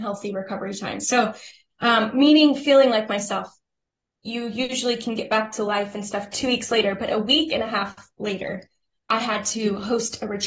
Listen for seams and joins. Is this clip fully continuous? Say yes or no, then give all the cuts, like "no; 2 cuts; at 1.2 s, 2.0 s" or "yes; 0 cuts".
yes; 0 cuts